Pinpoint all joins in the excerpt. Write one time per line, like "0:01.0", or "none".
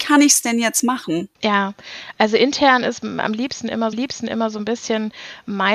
0:01.3
0:03.9